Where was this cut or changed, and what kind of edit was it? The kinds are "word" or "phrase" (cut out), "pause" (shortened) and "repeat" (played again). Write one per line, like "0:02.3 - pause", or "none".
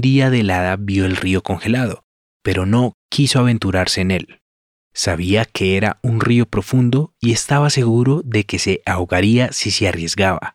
none